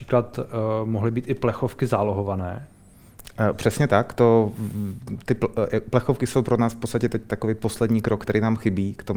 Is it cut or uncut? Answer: uncut